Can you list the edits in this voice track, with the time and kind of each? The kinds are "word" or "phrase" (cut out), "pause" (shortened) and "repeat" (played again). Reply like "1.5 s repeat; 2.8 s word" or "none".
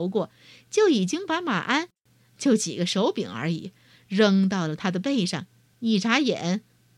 5.7 s pause